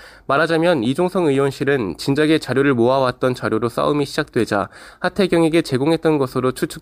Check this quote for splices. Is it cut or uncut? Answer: uncut